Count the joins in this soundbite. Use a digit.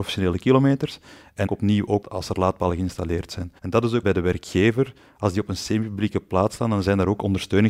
4